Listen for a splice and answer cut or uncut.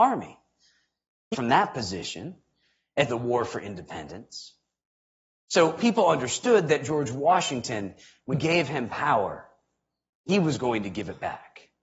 cut